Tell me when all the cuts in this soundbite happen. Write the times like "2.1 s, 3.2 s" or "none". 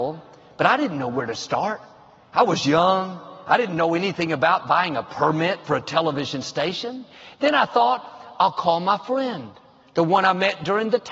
none